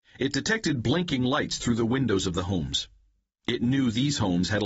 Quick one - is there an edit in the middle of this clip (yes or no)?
no